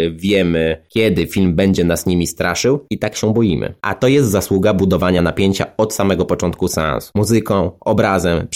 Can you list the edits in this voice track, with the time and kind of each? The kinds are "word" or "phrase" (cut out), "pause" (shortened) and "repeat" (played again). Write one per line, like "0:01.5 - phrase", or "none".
none